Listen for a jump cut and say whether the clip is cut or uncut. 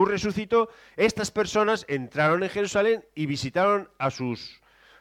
uncut